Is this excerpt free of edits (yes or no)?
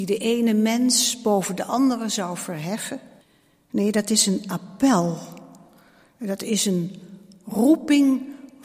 no